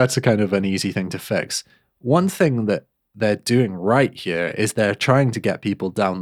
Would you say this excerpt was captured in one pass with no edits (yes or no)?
yes